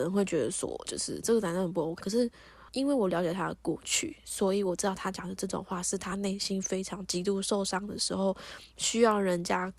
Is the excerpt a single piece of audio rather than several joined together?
no; 2 cuts; at 2.0 s, 2.7 s

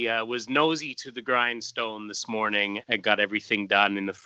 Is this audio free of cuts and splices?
no; 1 cut; at 2.8 s

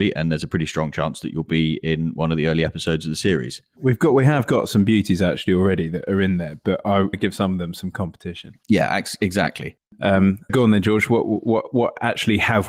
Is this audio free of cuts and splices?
no; 2 cuts; at 7.1 s, 10.5 s

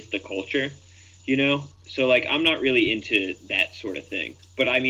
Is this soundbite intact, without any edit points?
yes; 0 cuts

